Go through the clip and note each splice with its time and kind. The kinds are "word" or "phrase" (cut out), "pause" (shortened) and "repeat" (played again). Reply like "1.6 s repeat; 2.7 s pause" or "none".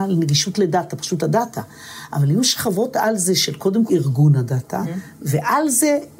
1.2 s word; 3.9 s word; 4.8 s word